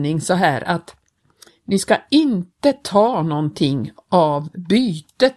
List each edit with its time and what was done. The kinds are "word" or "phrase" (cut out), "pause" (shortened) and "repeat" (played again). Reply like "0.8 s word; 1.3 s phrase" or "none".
none